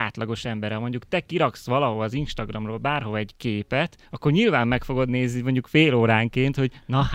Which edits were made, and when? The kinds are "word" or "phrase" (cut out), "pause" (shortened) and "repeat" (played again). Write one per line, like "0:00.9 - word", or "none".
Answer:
0:04.1 - pause